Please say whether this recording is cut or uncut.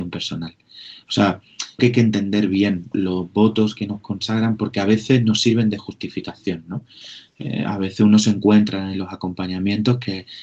cut